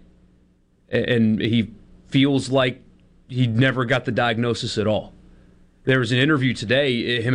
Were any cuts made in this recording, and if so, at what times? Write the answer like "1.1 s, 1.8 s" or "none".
none